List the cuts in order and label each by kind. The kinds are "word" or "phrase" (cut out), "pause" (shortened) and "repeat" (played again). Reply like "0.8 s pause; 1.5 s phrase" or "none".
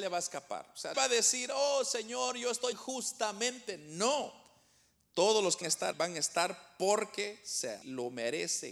0.9 s word; 2.7 s word; 5.6 s word; 5.9 s word; 7.8 s word